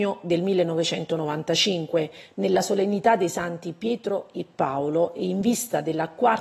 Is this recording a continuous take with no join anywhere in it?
yes; 0 cuts

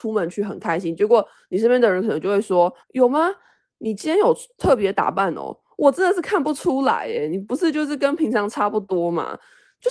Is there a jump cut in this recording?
yes; 1 cut; at 2.8 s

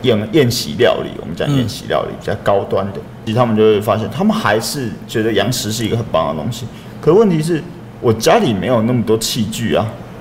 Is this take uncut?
no; 1 cut; at 3.3 s

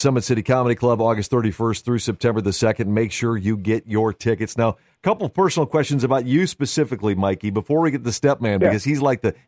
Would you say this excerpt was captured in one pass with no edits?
yes; 0 cuts

